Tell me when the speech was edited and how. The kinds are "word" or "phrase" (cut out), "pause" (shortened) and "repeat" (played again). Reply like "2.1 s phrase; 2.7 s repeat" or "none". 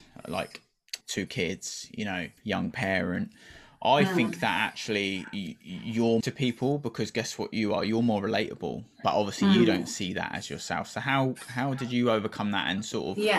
1.0 s pause; 2.4 s pause; 6.2 s phrase